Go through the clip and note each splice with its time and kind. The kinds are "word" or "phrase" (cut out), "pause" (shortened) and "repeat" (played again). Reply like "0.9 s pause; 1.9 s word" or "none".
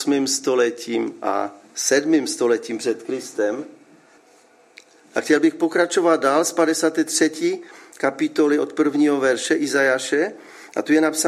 none